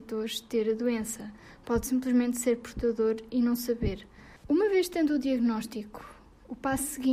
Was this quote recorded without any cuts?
yes; 0 cuts

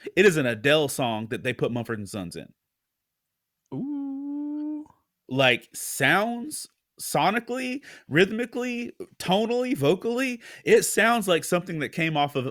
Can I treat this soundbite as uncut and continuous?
no; 1 cut; at 5.7 s

